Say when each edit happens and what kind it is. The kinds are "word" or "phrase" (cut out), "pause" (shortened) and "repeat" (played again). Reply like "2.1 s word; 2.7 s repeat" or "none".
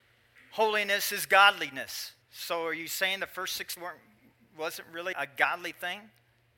2.2 s pause; 3.8 s word; 5.1 s word

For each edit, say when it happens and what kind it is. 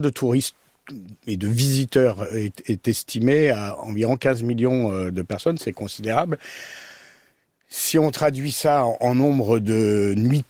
none

